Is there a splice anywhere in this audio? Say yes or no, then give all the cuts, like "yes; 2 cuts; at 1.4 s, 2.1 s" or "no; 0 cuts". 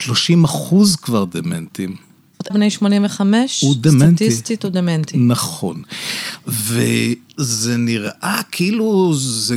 yes; 1 cut; at 2.5 s